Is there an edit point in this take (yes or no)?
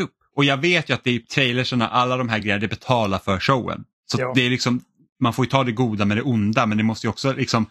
no